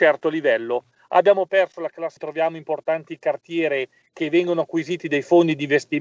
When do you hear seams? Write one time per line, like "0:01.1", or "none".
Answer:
0:02.2